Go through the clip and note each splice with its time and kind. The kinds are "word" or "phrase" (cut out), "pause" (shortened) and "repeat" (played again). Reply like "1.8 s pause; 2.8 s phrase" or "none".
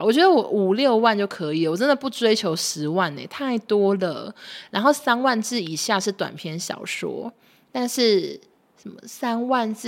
none